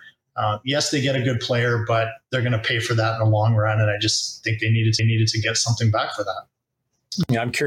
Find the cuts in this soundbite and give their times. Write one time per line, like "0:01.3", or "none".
0:05.0